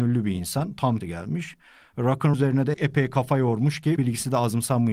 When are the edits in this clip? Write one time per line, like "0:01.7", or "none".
0:01.0
0:02.3
0:02.7
0:04.0